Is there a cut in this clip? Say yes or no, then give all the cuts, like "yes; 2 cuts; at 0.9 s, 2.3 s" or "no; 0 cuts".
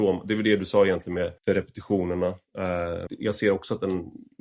yes; 2 cuts; at 1.4 s, 3.1 s